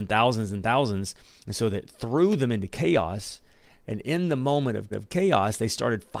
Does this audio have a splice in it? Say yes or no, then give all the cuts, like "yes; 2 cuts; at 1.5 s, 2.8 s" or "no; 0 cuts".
yes; 1 cut; at 4.9 s